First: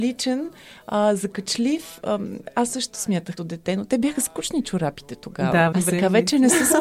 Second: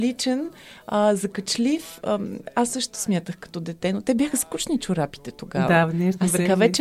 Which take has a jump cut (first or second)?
first